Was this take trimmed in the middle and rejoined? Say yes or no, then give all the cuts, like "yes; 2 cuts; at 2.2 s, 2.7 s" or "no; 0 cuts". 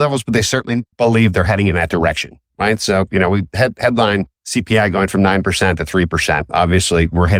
yes; 2 cuts; at 0.9 s, 4.3 s